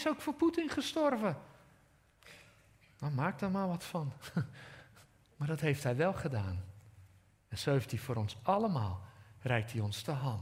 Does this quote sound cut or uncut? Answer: uncut